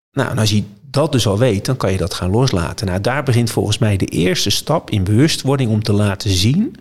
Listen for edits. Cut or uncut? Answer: uncut